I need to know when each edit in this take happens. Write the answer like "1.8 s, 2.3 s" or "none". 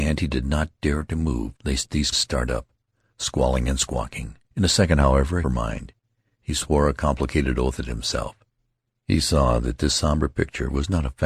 1.6 s, 2.1 s, 4.4 s, 5.4 s